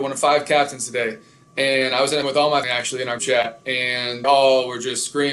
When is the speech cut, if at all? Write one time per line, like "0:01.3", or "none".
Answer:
0:02.2
0:02.6
0:03.2
0:04.2